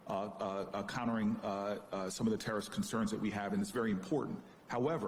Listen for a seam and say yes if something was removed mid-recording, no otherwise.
no